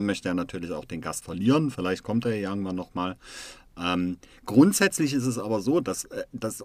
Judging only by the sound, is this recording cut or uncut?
cut